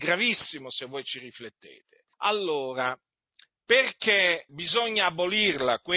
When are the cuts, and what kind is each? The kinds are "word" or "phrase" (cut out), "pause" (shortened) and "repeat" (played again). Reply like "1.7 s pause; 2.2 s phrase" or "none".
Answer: 2.1 s pause; 4.5 s word